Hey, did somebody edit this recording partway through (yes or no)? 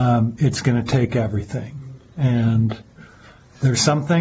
no